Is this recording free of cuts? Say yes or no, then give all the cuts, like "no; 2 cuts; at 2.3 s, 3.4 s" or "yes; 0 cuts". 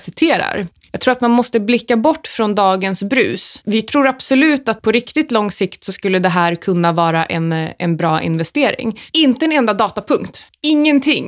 yes; 0 cuts